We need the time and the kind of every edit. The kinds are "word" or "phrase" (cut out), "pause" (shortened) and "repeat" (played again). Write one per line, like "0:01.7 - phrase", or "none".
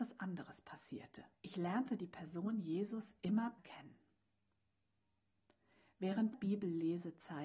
0:01.3 - pause
0:03.6 - word
0:06.3 - word